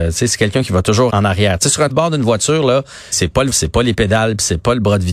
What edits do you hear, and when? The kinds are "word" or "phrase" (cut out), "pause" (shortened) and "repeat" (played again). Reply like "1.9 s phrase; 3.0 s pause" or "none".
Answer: 1.1 s word; 1.9 s word; 3.1 s word; 3.5 s word